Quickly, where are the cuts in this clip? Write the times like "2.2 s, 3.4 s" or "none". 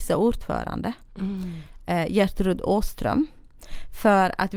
none